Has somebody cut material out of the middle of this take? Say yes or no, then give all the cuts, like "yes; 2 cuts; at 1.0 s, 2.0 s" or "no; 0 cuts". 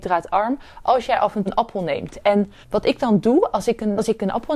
yes; 2 cuts; at 1.5 s, 2.6 s